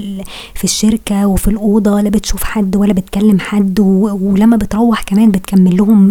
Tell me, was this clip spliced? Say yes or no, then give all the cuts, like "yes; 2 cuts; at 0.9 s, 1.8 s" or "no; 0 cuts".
no; 0 cuts